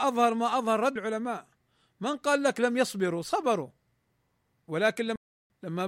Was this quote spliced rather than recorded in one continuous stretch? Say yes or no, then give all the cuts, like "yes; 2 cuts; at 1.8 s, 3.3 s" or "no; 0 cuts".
yes; 1 cut; at 1.0 s